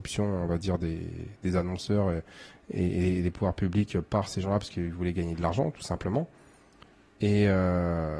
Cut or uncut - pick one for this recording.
uncut